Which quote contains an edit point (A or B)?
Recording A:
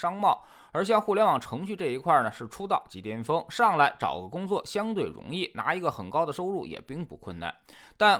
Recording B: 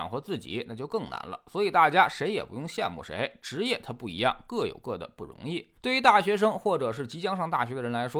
B